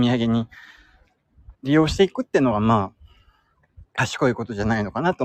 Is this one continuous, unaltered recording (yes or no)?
no